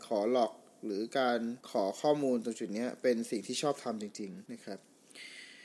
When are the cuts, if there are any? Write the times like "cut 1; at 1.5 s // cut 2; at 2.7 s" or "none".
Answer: cut 1; at 1.6 s // cut 2; at 4.5 s